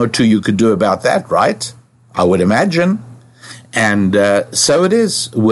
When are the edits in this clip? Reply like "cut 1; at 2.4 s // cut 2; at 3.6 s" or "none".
none